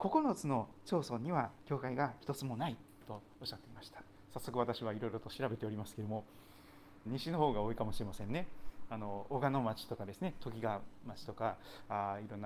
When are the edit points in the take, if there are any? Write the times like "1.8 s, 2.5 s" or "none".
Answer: 7.1 s